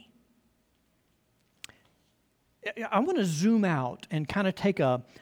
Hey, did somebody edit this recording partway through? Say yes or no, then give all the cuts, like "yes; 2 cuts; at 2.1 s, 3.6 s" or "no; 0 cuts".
no; 0 cuts